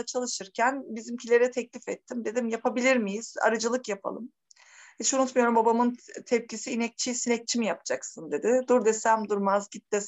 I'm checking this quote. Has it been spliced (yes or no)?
no